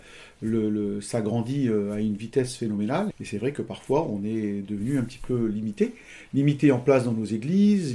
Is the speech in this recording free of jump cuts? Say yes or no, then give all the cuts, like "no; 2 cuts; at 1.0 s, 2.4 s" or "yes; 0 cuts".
no; 1 cut; at 3.1 s